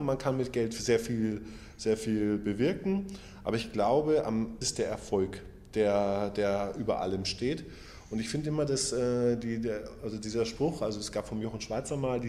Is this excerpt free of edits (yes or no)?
no